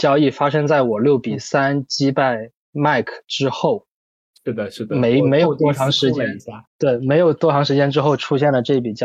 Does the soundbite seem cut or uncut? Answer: cut